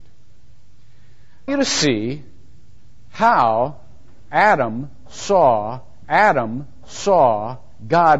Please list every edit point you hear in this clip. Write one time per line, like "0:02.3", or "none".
0:01.5
0:06.0